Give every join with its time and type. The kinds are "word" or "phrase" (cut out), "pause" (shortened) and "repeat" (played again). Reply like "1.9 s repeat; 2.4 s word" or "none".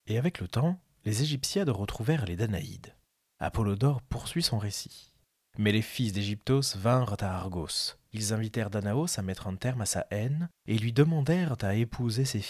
none